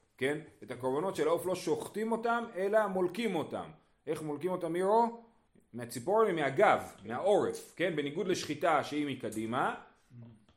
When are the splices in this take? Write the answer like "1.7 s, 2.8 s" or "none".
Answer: 5.5 s